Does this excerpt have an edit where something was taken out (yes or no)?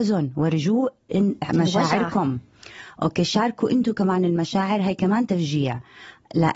no